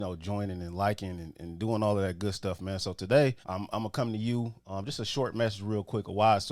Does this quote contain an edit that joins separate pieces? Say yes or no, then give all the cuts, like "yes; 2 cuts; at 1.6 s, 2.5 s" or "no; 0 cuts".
yes; 1 cut; at 3.4 s